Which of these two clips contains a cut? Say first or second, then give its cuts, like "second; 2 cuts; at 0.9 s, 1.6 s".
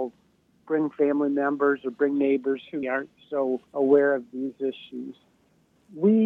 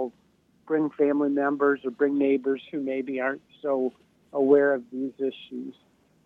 first; 2 cuts; at 2.8 s, 3.7 s